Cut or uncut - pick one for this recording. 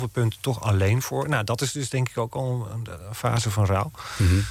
uncut